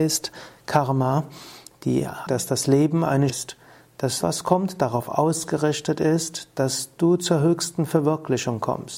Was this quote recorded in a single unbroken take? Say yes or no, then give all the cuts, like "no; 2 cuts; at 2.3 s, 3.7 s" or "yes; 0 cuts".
no; 3 cuts; at 2.3 s, 3.3 s, 4.2 s